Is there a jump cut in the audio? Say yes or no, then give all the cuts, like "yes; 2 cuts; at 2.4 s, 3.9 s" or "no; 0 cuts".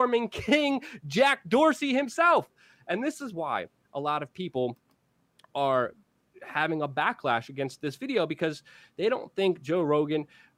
no; 0 cuts